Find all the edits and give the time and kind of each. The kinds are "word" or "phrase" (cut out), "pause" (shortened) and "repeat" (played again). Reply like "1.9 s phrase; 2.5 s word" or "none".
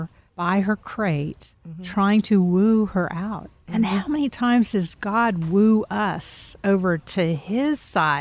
none